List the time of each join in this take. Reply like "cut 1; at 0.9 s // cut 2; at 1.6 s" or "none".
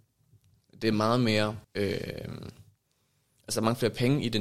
cut 1; at 1.6 s